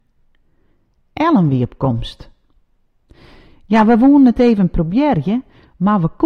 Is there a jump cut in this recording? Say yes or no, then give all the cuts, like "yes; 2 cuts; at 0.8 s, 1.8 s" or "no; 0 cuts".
no; 0 cuts